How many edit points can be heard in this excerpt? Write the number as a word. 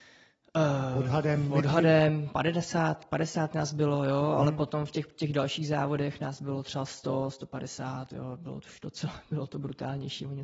zero